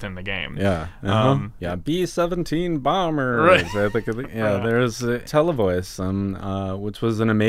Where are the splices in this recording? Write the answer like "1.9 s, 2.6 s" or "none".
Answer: 1.6 s, 5.2 s

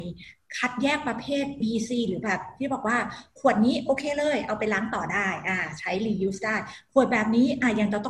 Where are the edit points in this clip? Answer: 1.6 s

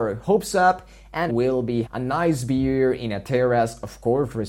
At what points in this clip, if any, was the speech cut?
1.3 s, 1.8 s

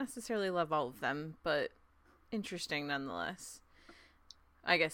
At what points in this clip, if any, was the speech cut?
none

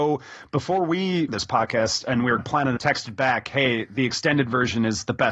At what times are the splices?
1.3 s, 2.4 s, 2.8 s

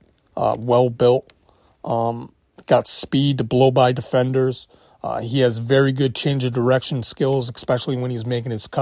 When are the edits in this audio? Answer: none

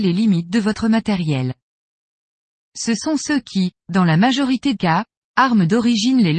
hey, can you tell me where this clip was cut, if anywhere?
4.7 s

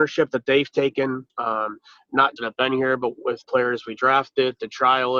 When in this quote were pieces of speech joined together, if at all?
1.3 s, 2.4 s, 3.4 s

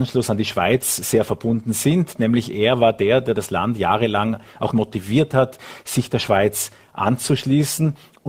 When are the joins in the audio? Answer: 4.7 s

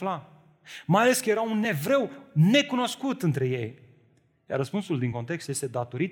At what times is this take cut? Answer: none

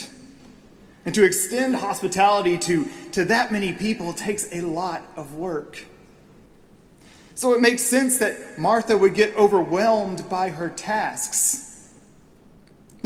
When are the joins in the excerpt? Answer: none

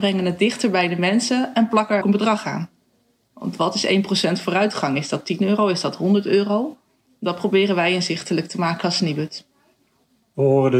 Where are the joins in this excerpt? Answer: 2.0 s

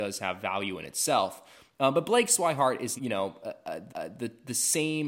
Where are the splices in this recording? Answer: 3.0 s, 3.9 s

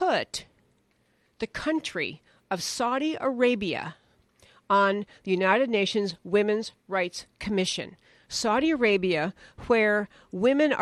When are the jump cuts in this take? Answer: none

